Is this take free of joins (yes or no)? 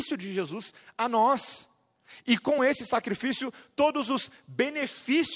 yes